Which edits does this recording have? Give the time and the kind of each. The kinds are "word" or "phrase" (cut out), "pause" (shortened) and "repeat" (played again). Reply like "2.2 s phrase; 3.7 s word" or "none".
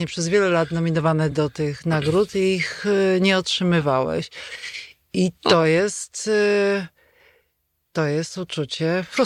none